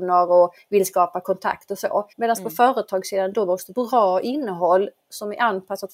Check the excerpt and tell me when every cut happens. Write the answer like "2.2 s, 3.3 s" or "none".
2.1 s, 3.7 s